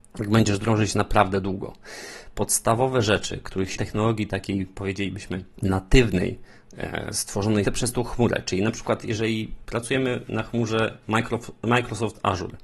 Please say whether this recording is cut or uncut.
cut